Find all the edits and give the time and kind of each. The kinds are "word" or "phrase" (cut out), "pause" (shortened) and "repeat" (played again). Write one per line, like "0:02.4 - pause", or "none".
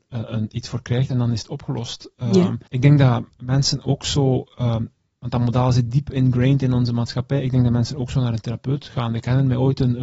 0:02.7 - pause